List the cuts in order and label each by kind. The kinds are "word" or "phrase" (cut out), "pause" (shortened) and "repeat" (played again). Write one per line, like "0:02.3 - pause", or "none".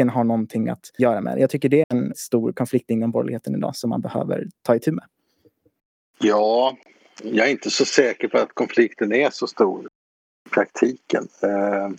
0:01.0 - word
0:01.8 - word
0:02.1 - word